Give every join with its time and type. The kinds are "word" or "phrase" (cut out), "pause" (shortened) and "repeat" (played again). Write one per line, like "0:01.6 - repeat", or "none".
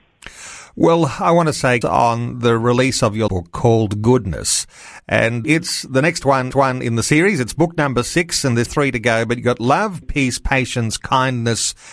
0:01.8 - word
0:03.3 - word
0:05.4 - word
0:06.5 - repeat
0:08.7 - word
0:10.0 - word